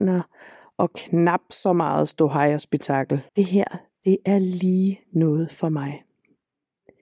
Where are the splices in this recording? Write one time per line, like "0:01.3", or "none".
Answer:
0:03.3